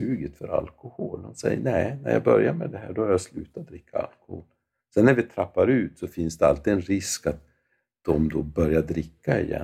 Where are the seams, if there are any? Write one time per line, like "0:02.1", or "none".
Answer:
none